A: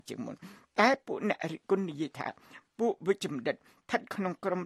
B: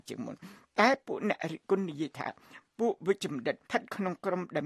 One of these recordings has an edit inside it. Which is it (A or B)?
B